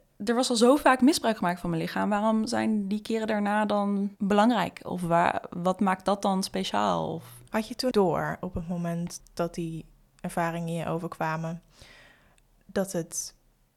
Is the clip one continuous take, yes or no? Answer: no